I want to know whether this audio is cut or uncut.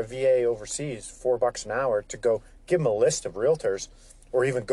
uncut